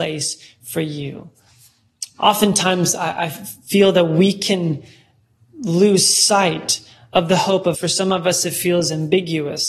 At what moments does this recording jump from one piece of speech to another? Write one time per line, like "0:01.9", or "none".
0:07.7